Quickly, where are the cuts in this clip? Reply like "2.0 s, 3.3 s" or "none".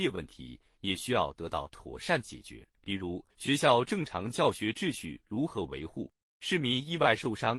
2.7 s, 3.3 s